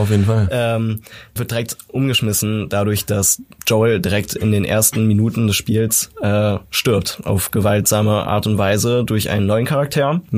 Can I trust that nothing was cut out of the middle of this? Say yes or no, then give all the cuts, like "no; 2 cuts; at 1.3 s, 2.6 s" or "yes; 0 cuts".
no; 1 cut; at 1.4 s